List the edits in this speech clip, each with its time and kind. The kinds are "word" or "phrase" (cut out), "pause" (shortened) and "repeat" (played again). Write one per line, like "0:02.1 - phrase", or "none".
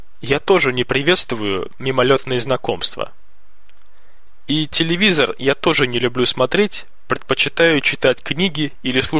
none